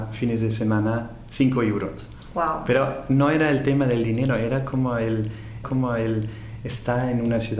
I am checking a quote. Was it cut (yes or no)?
yes